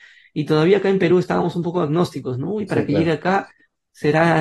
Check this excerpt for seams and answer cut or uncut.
uncut